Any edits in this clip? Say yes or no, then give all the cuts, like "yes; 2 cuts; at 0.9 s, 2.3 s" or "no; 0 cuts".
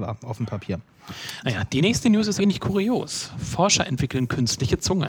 yes; 1 cut; at 2.4 s